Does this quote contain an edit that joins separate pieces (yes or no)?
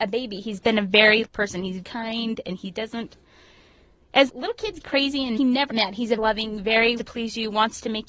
yes